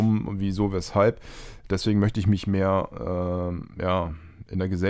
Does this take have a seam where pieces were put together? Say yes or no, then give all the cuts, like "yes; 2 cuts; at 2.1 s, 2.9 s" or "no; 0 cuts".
no; 0 cuts